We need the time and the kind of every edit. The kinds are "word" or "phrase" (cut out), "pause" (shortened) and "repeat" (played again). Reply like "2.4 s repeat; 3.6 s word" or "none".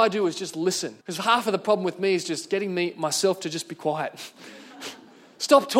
1.0 s pause

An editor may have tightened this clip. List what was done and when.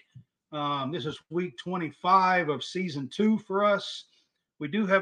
none

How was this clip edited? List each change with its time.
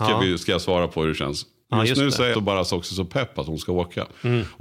2.3 s word

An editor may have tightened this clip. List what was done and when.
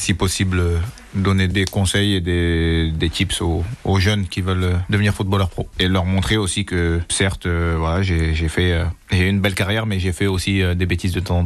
9.0 s pause

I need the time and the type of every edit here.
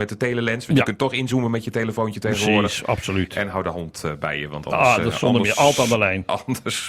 none

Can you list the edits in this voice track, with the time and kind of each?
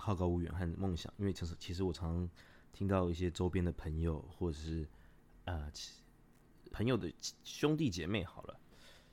6.7 s word

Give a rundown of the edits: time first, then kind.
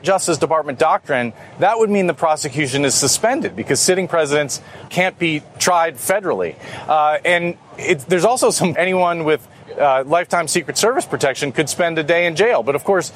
4.9 s word; 8.7 s phrase

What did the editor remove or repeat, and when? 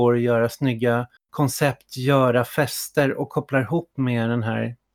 1.2 s pause

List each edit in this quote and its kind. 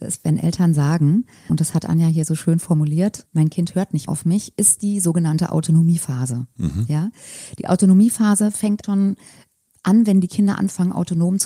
1.5 s word; 3.3 s word; 4.1 s word; 8.8 s word

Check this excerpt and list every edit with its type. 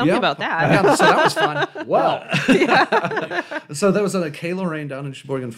none

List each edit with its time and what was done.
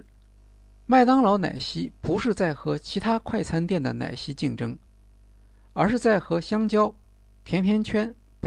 none

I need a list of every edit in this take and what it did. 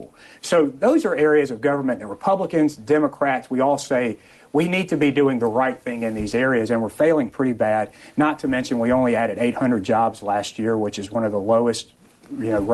none

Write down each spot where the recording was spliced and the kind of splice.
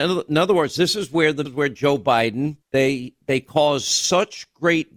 1.4 s phrase; 2.6 s pause

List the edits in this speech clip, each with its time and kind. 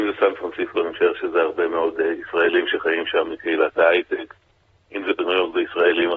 none

